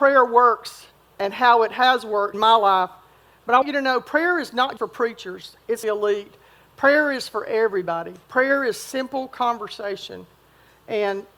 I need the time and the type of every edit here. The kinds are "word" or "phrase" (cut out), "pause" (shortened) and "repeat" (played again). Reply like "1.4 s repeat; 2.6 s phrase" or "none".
0.9 s pause; 2.3 s word; 3.6 s word; 4.8 s word; 5.8 s phrase; 8.2 s pause

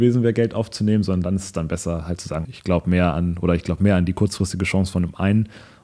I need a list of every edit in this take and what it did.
2.4 s word

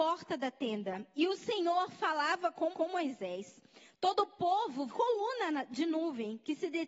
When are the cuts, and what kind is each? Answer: 2.7 s repeat; 4.9 s word

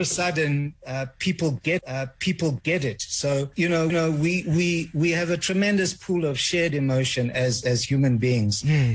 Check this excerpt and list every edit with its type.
1.8 s repeat; 3.9 s repeat

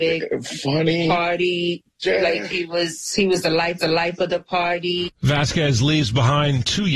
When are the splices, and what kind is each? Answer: 3.8 s repeat

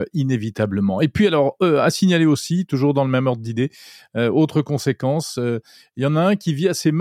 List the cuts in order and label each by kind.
none

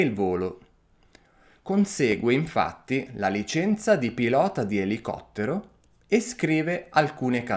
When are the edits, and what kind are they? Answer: none

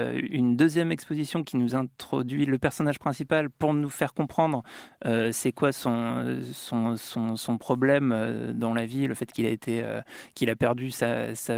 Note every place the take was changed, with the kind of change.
none

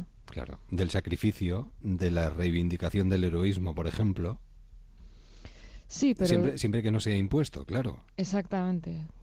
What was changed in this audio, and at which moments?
none

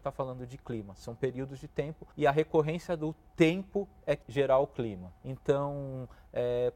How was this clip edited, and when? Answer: 2.1 s pause; 4.2 s word; 5.2 s pause

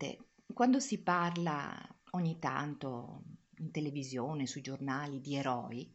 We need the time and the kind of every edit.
2.0 s pause

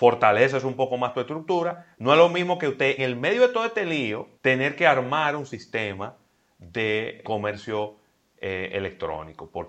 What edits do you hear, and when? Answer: 3.0 s word; 4.4 s pause; 7.2 s word

